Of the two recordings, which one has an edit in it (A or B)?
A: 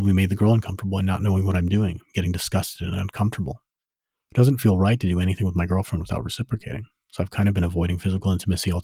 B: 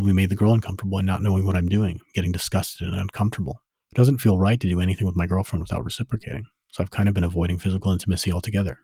B